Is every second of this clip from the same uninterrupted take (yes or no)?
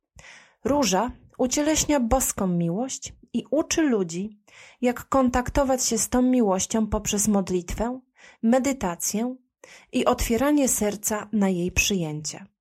yes